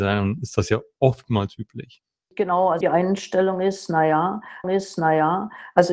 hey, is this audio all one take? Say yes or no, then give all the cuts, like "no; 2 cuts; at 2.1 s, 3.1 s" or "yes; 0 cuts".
no; 2 cuts; at 2.8 s, 4.6 s